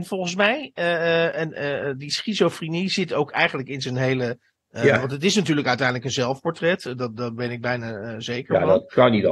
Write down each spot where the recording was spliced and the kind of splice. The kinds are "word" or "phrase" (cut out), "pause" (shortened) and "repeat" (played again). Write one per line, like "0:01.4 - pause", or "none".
none